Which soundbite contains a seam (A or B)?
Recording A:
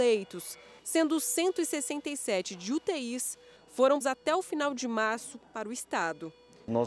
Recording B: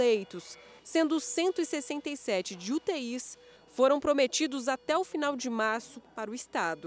A